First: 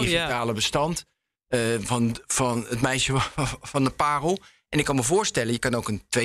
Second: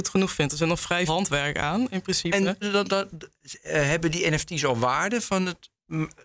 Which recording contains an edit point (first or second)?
second